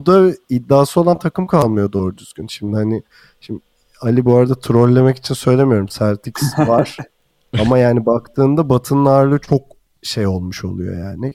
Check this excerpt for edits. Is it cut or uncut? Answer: uncut